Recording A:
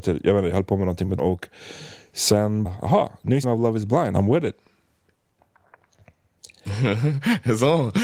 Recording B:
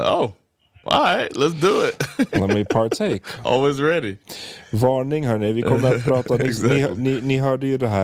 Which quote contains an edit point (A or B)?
A